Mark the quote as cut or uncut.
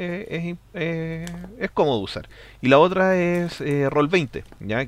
uncut